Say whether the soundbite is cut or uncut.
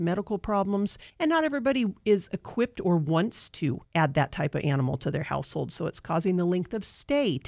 cut